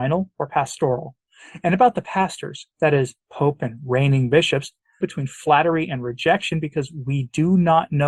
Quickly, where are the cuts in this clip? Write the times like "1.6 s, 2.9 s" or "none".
3.2 s, 5.0 s

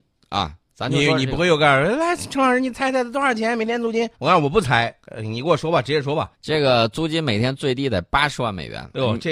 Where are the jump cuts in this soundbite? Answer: 4.1 s, 6.3 s

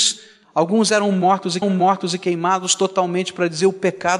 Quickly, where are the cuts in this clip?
1.6 s

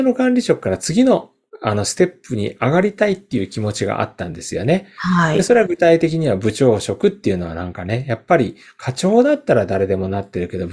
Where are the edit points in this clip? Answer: none

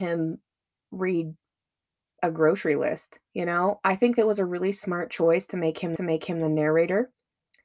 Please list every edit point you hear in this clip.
6.0 s

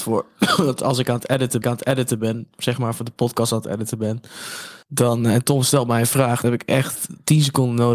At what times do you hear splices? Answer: 1.6 s, 4.8 s, 6.4 s

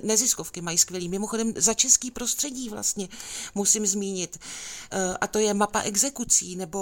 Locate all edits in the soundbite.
none

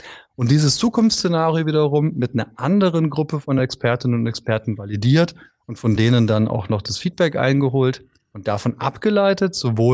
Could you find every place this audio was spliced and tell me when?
none

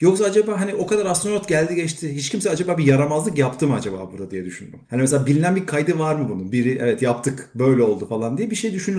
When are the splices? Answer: 4.8 s

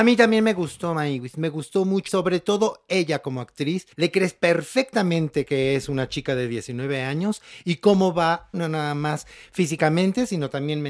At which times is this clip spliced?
2.1 s, 3.9 s, 8.5 s

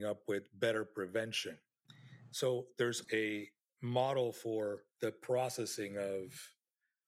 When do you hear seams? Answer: 3.0 s, 4.9 s

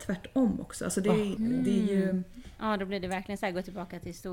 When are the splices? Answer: 1.4 s

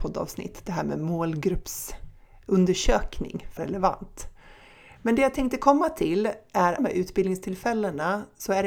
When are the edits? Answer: 3.6 s, 6.8 s

